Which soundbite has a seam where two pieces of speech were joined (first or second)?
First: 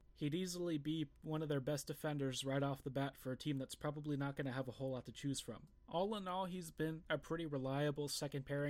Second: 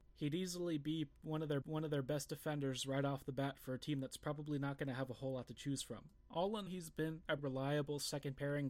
second